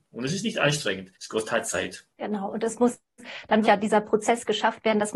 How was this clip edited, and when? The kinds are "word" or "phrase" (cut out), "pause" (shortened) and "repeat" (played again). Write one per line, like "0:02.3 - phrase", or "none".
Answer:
0:01.1 - pause
0:02.1 - pause
0:03.6 - word

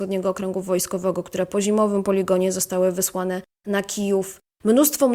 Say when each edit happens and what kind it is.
none

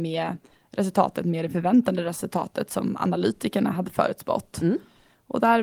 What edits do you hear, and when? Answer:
none

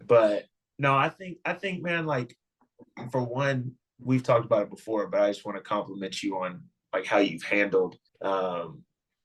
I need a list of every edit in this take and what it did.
0:08.1 - pause

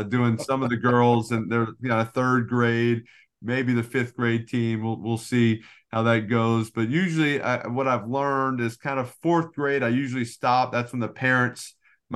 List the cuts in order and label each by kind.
none

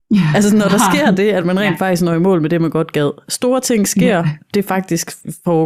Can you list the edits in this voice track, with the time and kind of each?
none

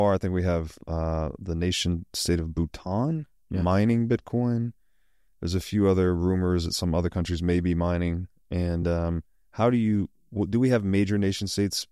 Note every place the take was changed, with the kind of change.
none

